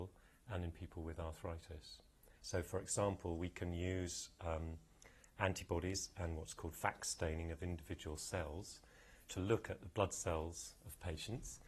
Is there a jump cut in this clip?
yes; 1 cut; at 2.4 s

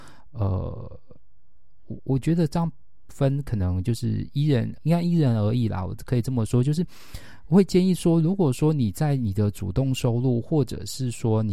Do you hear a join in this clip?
yes; 1 cut; at 4.8 s

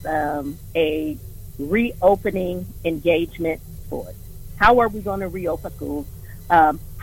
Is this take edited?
yes; 2 cuts; at 3.8 s, 5.7 s

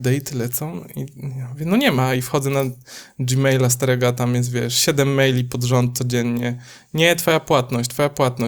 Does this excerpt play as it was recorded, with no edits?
yes; 0 cuts

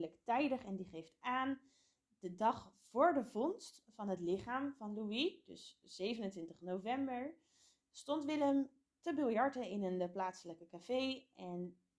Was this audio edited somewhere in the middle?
no; 0 cuts

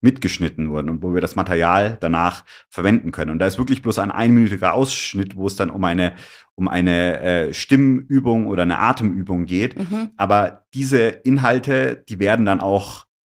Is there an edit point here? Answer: no; 0 cuts

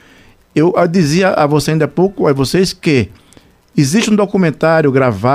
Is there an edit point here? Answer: no; 0 cuts

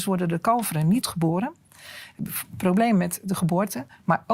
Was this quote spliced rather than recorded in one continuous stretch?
yes; 1 cut; at 1.0 s

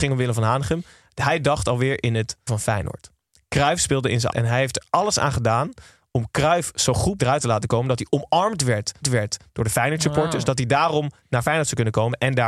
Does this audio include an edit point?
yes; 5 cuts; at 2.5 s, 4.3 s, 7.2 s, 9.0 s, 11.2 s

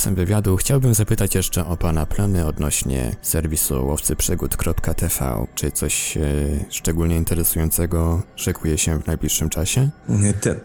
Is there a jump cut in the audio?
no; 0 cuts

